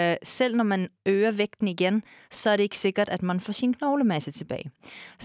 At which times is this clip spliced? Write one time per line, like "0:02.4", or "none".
none